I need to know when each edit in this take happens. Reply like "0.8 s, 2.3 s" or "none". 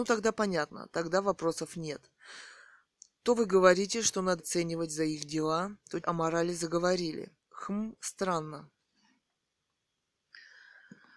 4.4 s, 6.0 s